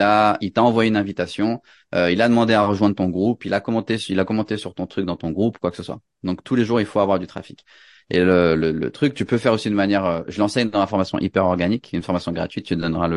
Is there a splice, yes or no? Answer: no